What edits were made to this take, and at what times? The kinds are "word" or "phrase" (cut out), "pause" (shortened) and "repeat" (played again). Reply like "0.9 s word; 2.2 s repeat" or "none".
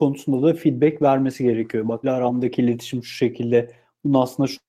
2.0 s word